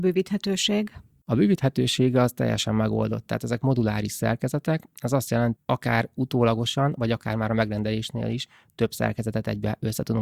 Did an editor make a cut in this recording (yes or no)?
yes